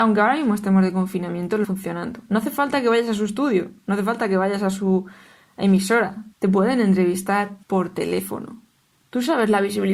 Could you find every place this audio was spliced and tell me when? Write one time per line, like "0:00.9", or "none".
0:01.6
0:06.3
0:07.6